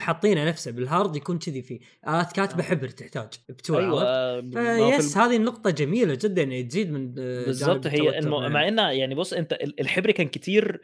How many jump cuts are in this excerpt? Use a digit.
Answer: 1